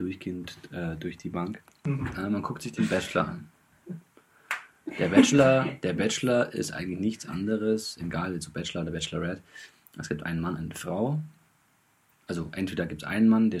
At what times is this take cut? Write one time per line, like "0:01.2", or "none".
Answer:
none